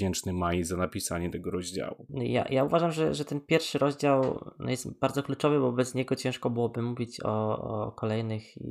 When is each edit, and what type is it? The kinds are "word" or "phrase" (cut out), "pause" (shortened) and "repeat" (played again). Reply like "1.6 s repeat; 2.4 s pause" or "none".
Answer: none